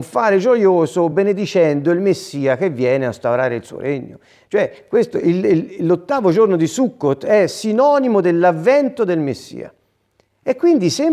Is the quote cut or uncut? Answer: uncut